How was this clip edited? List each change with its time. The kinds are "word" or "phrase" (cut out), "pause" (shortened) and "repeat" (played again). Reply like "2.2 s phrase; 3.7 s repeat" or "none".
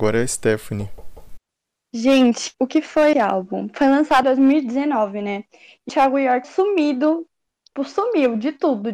2.5 s word; 3.1 s word; 4.2 s word; 5.9 s word; 6.4 s word; 7.8 s word